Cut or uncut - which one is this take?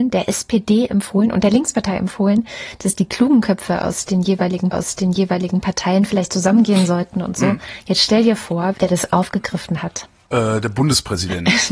cut